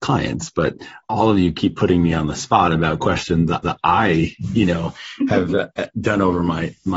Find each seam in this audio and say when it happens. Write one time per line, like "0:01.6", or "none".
0:01.0
0:03.6